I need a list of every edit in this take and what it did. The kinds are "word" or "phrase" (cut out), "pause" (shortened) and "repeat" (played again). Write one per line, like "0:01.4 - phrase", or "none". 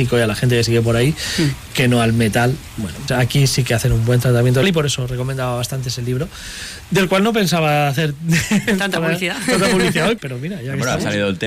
0:03.1 - word
0:04.6 - word
0:10.2 - word